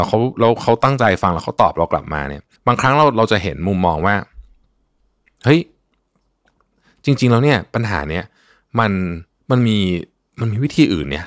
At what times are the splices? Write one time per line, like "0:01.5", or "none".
0:02.6
0:09.4

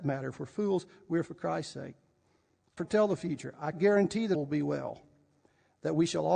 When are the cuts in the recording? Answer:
0:01.2
0:02.8
0:03.7
0:04.3

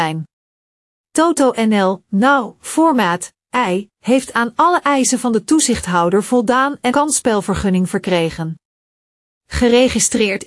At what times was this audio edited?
0:06.9

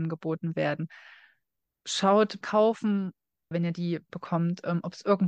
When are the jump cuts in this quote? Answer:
0:02.4
0:03.5
0:04.1

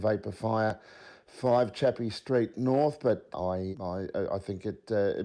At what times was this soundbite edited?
0:03.3
0:03.7

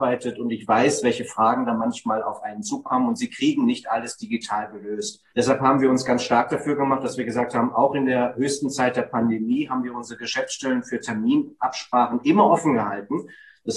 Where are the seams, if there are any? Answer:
0:05.3

